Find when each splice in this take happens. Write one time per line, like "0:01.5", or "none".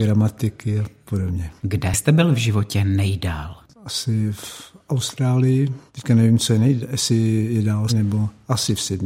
0:01.6
0:05.9
0:07.9